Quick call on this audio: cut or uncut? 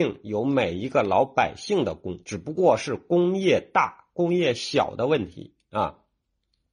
cut